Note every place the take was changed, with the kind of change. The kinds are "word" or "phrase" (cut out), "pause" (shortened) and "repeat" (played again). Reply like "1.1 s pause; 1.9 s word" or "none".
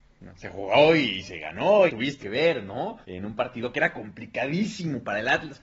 1.9 s phrase; 2.2 s word; 3.0 s pause